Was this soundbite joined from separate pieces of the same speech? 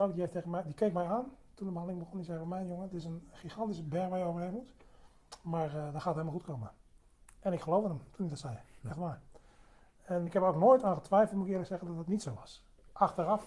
yes; 1 cut; at 10.3 s

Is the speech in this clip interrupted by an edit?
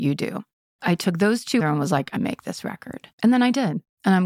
yes; 3 cuts; at 1.6 s, 2.2 s, 3.1 s

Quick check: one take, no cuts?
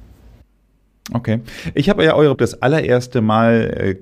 no; 1 cut; at 2.3 s

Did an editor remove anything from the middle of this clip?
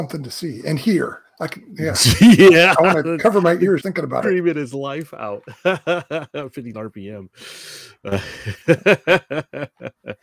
yes; 3 cuts; at 1.3 s, 3.8 s, 6.7 s

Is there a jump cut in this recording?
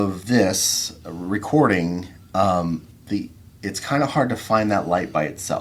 no; 0 cuts

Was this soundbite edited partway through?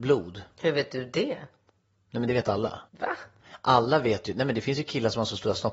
yes; 1 cut; at 2.9 s

